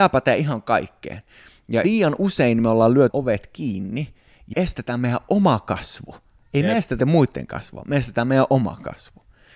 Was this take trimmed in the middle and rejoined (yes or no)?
yes